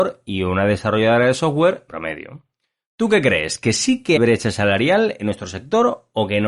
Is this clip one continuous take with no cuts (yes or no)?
no